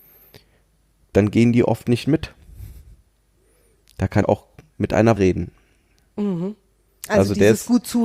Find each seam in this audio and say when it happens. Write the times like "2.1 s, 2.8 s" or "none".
4.2 s, 5.2 s